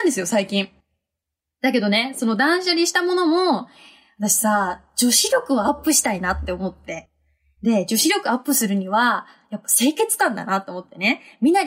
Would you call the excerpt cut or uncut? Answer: uncut